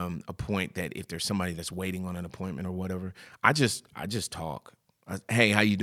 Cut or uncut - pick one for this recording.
uncut